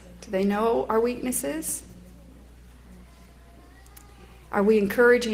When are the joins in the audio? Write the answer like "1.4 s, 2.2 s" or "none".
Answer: none